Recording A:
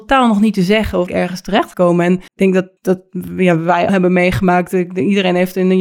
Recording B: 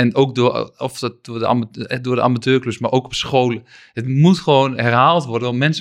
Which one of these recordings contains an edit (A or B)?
A